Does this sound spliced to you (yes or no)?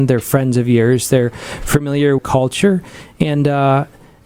yes